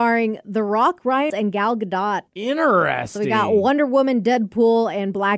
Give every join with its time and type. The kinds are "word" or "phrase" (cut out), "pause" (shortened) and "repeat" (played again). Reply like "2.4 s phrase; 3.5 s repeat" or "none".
1.3 s word; 2.3 s pause